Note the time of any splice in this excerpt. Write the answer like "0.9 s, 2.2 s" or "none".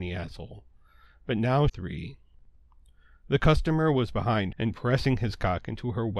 1.7 s, 4.5 s